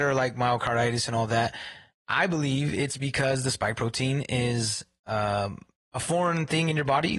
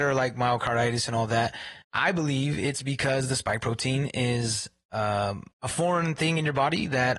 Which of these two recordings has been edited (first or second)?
second